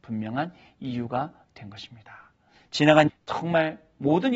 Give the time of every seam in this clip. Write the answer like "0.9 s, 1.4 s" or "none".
3.1 s